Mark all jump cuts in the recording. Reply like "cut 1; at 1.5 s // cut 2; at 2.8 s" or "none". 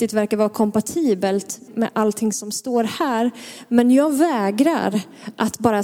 cut 1; at 1.7 s